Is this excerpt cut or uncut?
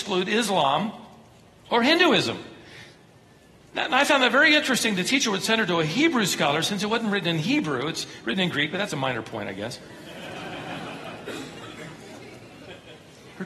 uncut